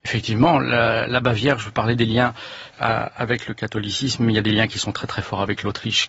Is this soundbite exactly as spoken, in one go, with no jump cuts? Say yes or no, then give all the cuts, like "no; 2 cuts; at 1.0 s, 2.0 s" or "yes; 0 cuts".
no; 1 cut; at 2.7 s